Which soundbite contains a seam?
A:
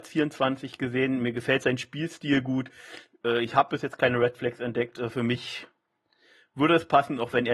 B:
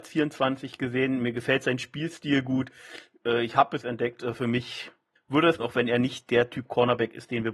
B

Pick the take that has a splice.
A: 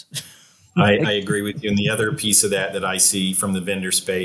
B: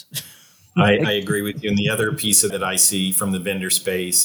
B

